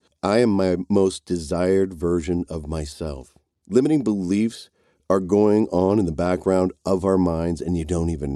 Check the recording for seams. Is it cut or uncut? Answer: uncut